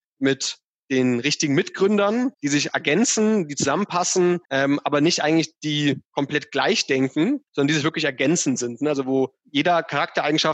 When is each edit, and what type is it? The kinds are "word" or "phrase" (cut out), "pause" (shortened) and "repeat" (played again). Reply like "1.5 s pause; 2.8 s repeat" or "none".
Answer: 2.3 s pause; 4.4 s pause; 6.1 s pause; 7.5 s pause; 9.4 s pause